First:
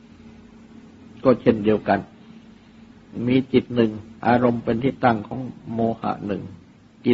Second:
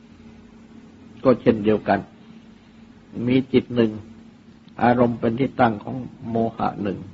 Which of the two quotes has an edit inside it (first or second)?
first